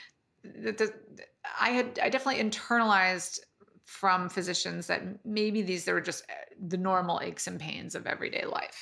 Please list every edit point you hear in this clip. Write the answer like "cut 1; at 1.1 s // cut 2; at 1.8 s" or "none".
none